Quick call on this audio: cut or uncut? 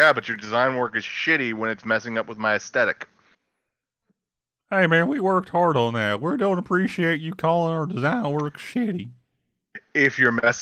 uncut